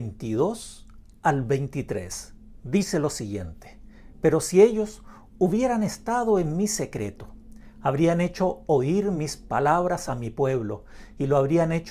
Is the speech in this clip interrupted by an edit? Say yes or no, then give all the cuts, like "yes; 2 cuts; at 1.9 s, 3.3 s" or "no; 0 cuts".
no; 0 cuts